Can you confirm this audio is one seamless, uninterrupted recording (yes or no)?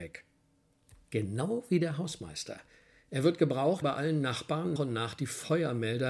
no